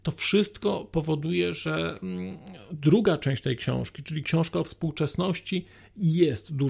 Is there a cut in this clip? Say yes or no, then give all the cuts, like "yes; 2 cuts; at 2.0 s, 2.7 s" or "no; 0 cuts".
no; 0 cuts